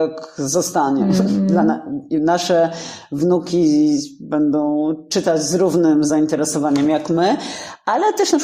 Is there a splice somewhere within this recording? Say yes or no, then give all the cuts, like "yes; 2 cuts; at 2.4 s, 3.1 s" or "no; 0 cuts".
no; 0 cuts